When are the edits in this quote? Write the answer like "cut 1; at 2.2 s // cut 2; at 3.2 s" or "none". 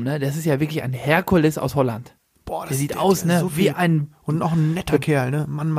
none